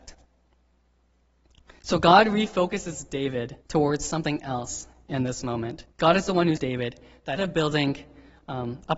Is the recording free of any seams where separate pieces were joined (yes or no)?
no